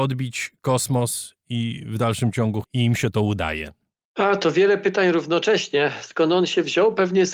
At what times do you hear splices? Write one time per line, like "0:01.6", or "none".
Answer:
0:02.6